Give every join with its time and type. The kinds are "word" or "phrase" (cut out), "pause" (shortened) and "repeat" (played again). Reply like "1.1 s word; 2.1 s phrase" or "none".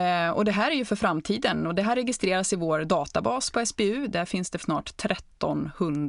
4.6 s word